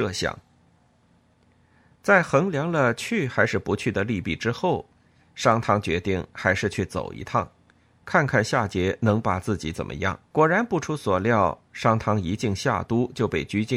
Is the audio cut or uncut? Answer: cut